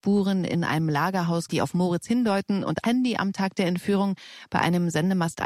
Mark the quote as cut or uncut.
cut